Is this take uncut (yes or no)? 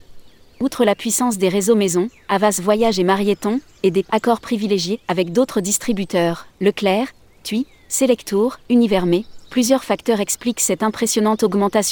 yes